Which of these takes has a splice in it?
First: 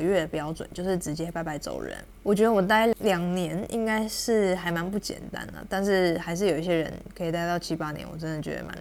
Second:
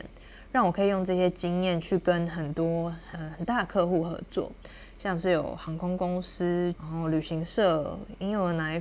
second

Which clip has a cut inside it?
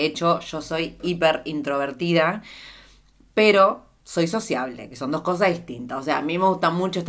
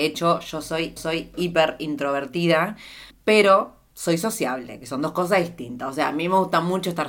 second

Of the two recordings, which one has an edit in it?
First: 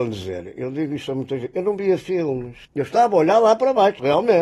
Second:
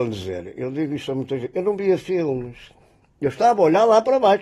first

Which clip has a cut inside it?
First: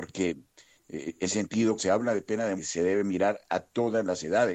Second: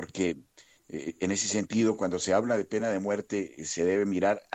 first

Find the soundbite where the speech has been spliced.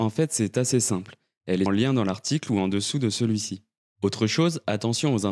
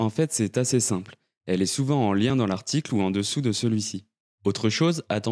first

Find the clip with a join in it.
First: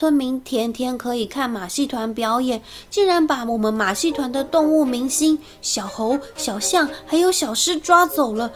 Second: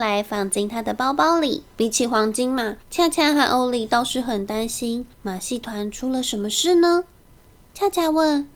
second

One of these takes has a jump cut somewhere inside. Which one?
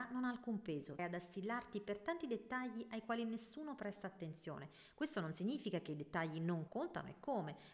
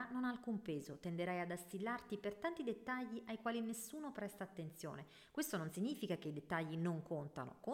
first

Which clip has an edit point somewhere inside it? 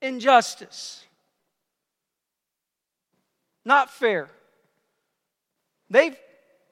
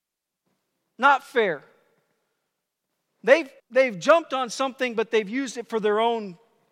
second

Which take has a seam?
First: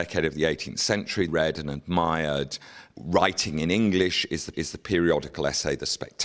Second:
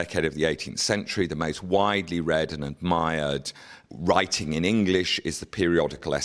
first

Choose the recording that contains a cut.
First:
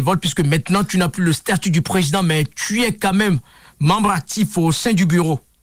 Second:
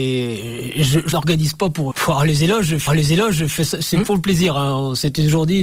second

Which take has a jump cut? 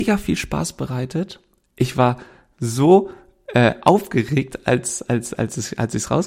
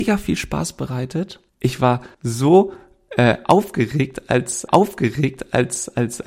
second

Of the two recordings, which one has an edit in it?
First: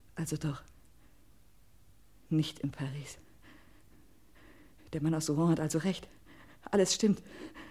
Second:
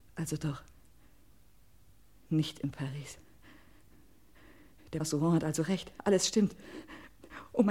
second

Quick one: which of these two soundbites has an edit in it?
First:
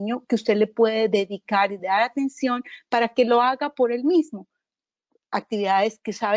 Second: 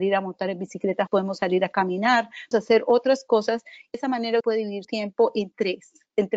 second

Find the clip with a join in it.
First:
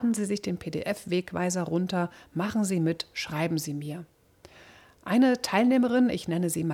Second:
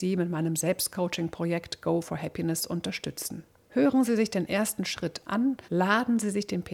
second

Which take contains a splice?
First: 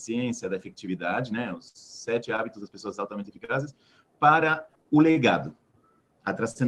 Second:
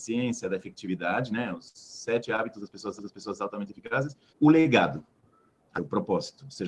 second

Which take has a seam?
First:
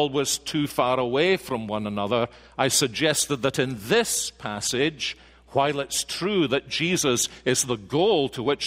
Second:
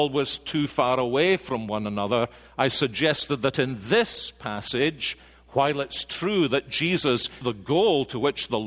second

